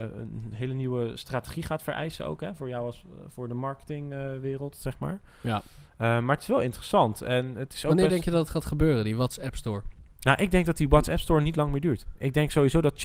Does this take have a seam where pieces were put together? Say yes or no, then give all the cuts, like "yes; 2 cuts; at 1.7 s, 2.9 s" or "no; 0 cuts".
no; 0 cuts